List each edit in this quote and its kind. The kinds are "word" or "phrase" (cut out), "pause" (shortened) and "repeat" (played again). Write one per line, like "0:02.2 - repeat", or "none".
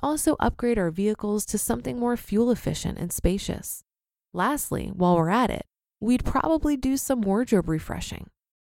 none